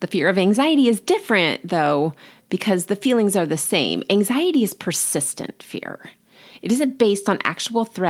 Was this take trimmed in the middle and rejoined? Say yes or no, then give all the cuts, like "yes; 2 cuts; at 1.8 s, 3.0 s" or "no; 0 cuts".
no; 0 cuts